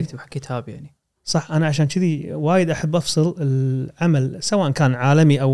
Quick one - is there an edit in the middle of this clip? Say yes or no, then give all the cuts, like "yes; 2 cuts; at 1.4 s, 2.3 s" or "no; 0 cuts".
no; 0 cuts